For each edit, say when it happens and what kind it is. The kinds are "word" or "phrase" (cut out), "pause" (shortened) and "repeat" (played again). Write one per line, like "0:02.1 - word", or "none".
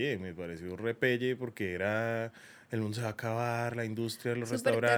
none